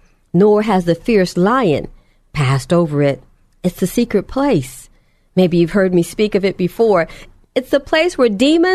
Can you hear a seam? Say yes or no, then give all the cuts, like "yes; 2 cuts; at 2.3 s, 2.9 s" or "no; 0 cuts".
yes; 1 cut; at 7.4 s